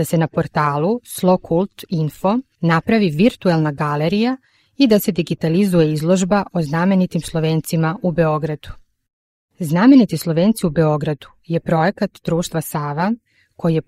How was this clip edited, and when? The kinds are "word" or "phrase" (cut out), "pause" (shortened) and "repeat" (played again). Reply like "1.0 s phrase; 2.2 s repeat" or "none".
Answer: none